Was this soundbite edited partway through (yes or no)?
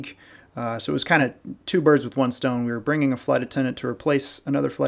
no